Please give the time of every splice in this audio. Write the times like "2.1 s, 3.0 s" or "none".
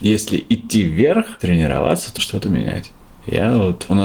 2.2 s